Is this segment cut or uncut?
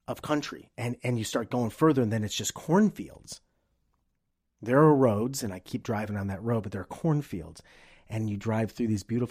uncut